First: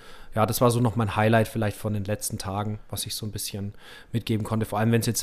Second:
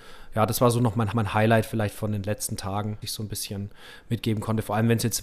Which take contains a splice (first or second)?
second